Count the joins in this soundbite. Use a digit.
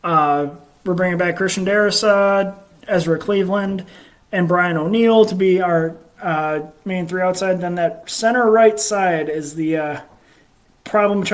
0